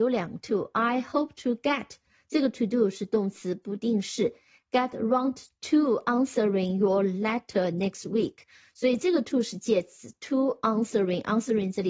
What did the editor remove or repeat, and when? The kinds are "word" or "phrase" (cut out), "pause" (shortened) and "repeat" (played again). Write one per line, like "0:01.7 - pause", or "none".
none